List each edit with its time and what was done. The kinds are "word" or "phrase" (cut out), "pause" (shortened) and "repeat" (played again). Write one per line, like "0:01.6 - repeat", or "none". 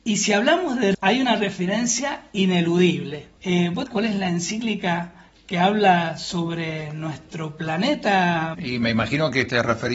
0:00.9 - word
0:03.4 - pause
0:03.9 - phrase
0:08.5 - word